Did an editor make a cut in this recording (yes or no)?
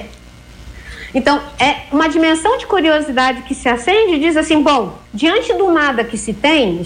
yes